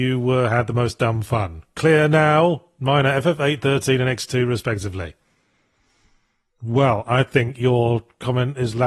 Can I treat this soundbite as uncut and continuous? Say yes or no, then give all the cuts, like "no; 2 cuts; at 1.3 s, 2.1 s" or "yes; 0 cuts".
yes; 0 cuts